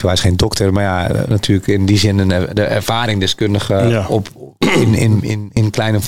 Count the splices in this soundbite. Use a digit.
0